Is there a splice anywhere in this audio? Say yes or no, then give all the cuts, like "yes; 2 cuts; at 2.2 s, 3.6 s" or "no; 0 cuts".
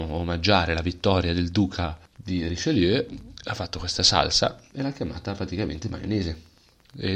yes; 1 cut; at 2.1 s